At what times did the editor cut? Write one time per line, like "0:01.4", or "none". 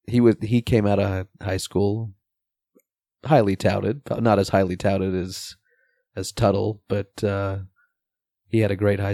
none